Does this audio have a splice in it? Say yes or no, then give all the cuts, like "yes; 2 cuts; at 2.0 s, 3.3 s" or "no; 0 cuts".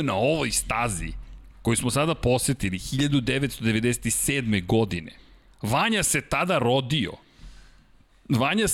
no; 0 cuts